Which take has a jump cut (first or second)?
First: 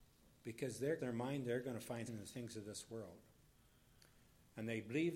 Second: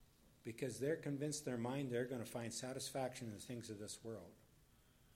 first